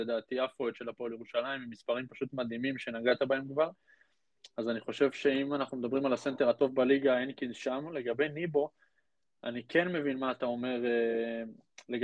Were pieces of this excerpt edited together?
no; 0 cuts

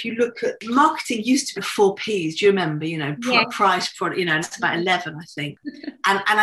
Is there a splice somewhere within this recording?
yes; 2 cuts; at 1.6 s, 4.4 s

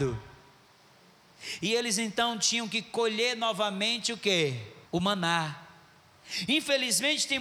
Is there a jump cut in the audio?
yes; 1 cut; at 4.9 s

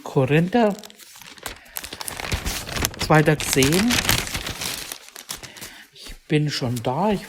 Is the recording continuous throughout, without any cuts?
no; 1 cut; at 3.4 s

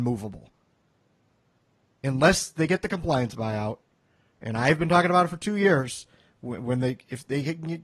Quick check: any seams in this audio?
no; 0 cuts

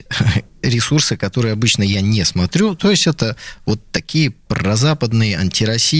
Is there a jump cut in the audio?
no; 0 cuts

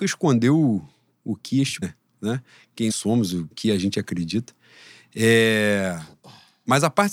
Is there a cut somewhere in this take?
yes; 3 cuts; at 1.8 s, 2.9 s, 3.5 s

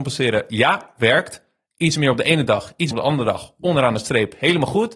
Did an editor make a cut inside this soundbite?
yes; 1 cut; at 2.9 s

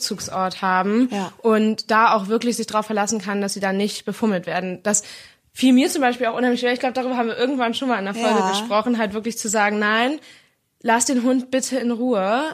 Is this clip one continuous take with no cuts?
yes; 0 cuts

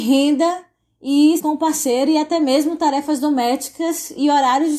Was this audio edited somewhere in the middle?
yes; 1 cut; at 1.4 s

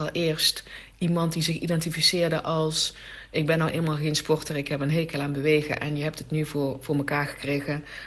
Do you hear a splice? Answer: no; 0 cuts

